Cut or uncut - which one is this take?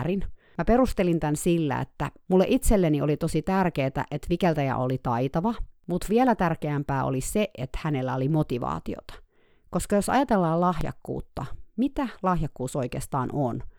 uncut